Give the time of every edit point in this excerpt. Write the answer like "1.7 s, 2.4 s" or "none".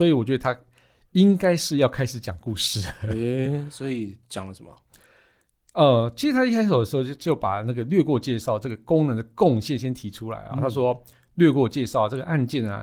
none